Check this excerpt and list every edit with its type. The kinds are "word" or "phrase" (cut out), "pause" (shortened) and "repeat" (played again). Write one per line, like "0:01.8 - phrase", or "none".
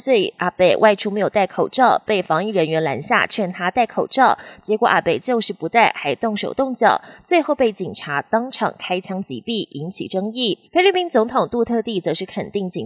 0:10.7 - pause

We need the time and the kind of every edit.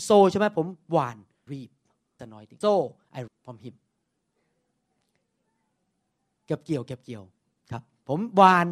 0:01.5 - word
0:02.2 - word
0:02.6 - word
0:03.3 - word

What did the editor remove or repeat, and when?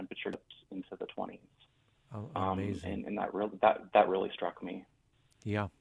none

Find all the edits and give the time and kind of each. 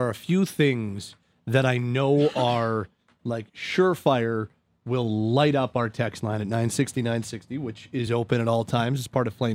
none

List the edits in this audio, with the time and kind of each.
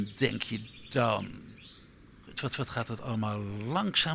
0:02.5 - repeat

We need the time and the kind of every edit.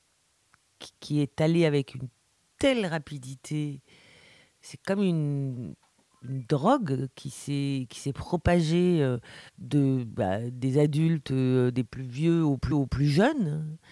0:00.9 - word
0:06.0 - pause
0:09.5 - pause
0:12.7 - repeat

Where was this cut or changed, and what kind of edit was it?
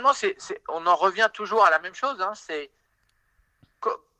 none

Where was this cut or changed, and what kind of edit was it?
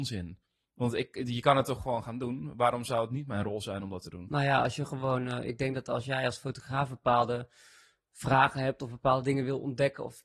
none

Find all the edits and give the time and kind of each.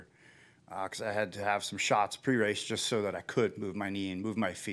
none

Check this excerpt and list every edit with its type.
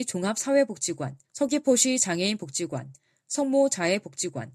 0:01.2 - pause

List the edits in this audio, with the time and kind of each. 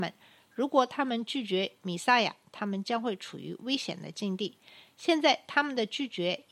none

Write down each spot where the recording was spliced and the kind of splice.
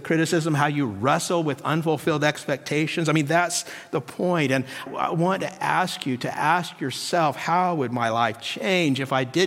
0:04.9 - word

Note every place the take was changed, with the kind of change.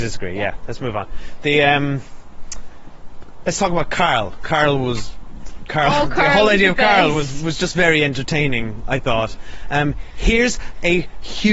none

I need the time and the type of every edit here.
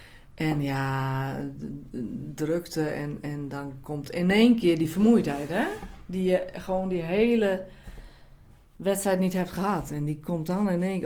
none

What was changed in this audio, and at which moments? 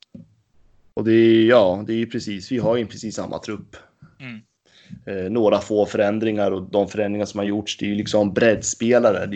none

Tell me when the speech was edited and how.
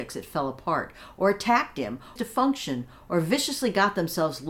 0:02.2 - phrase

